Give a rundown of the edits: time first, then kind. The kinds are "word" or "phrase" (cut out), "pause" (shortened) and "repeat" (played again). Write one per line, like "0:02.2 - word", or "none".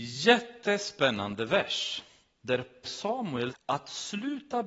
0:02.8 - word
0:03.5 - word